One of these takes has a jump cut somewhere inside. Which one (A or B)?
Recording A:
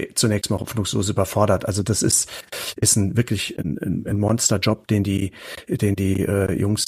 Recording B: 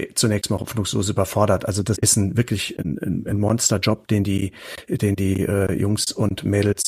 B